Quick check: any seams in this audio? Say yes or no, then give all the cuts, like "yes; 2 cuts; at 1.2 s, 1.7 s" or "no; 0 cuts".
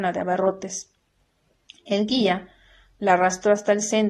no; 0 cuts